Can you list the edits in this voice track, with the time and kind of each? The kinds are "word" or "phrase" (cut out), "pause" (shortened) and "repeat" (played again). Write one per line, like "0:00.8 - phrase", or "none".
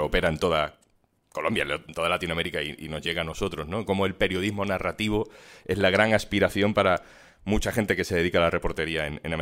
none